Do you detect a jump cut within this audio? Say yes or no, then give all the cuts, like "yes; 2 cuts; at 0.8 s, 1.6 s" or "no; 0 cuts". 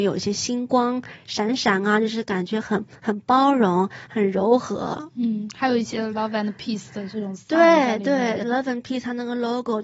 no; 0 cuts